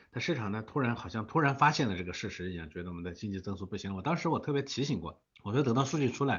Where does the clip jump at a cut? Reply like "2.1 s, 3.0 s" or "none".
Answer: 5.3 s